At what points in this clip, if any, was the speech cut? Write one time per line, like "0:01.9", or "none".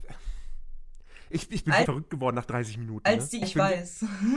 0:01.9
0:03.4